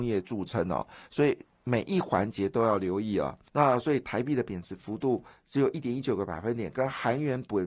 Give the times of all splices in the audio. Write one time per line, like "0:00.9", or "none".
0:03.5